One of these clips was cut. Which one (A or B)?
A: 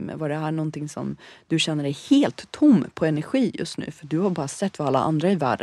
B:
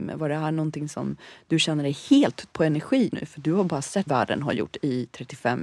B